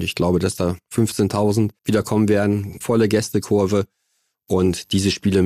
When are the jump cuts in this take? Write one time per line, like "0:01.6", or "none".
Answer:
0:01.8
0:02.8